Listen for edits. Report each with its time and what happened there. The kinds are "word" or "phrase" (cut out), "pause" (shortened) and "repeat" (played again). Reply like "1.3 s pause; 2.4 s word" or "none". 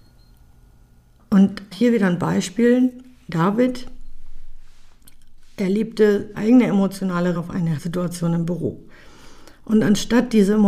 1.7 s word; 6.3 s word; 7.4 s word; 7.8 s word